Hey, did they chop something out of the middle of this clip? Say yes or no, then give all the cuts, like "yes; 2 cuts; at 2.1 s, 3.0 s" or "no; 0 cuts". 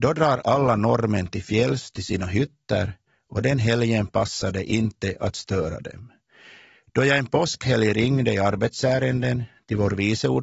no; 0 cuts